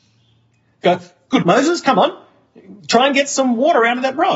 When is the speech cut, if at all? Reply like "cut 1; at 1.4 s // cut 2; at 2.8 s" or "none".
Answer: cut 1; at 1.4 s